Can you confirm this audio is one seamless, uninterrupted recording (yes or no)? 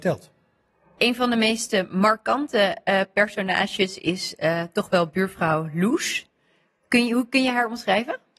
yes